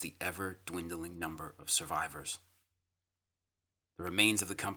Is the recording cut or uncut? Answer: uncut